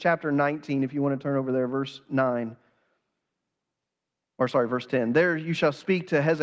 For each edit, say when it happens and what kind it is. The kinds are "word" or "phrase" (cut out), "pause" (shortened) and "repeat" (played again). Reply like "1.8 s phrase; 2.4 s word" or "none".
none